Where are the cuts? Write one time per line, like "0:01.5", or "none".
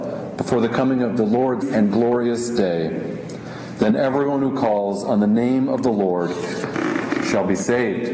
0:01.6